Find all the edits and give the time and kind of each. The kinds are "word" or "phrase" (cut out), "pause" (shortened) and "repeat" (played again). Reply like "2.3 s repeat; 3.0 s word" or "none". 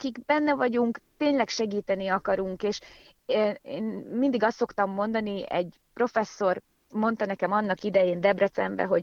none